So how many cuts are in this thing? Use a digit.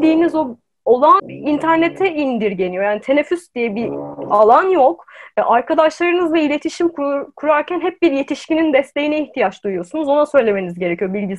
1